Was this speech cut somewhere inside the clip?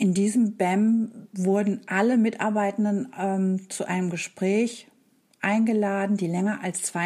no; 0 cuts

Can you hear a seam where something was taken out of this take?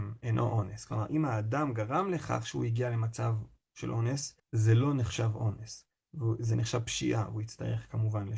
yes; 1 cut; at 4.4 s

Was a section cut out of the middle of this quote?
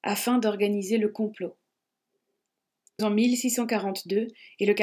yes; 1 cut; at 3.0 s

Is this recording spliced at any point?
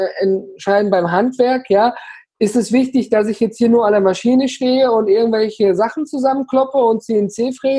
no; 0 cuts

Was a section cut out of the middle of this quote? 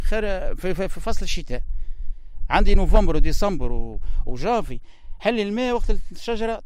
no; 0 cuts

